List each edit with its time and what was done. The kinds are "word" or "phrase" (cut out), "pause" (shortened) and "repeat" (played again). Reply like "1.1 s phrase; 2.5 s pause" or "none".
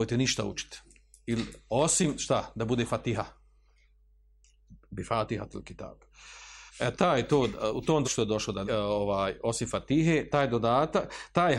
6.7 s pause; 8.0 s word; 8.6 s phrase